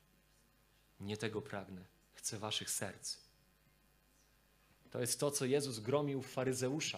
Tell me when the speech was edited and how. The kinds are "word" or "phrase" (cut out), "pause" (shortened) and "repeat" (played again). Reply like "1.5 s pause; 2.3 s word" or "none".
2.0 s pause